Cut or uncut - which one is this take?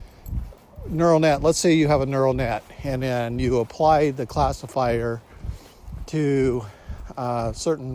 uncut